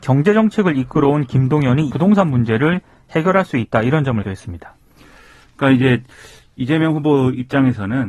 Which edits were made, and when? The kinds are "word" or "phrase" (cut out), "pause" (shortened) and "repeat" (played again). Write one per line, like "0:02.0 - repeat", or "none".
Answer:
0:01.9 - word
0:04.2 - word